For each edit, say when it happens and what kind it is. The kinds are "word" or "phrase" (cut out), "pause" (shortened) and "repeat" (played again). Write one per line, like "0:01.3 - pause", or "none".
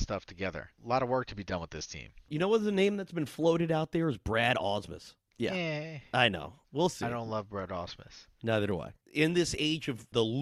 0:09.0 - pause